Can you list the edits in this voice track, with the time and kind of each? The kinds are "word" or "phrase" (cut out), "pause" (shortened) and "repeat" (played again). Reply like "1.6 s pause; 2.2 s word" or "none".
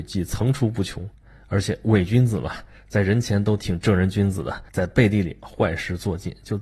4.7 s pause